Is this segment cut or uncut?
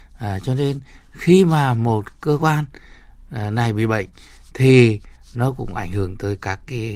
uncut